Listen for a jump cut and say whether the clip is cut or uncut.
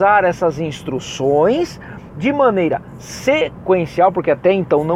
uncut